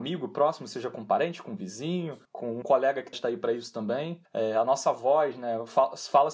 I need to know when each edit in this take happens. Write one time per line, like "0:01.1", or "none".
0:02.6
0:03.1